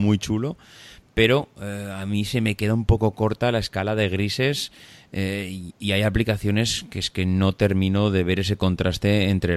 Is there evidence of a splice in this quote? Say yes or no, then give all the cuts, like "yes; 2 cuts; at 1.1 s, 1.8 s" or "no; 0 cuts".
no; 0 cuts